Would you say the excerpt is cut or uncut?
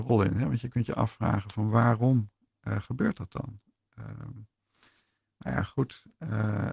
uncut